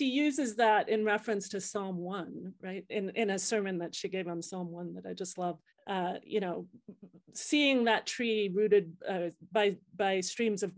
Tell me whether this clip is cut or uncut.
cut